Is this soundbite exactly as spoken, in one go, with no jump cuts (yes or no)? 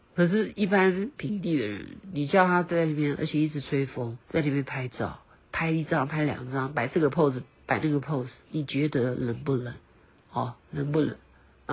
no